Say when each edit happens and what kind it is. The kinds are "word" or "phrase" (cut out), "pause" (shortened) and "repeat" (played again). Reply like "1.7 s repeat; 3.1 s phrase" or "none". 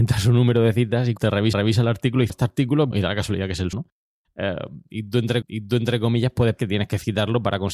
1.2 s word; 1.5 s repeat; 2.3 s word; 2.9 s word; 3.7 s word; 5.4 s repeat; 6.6 s word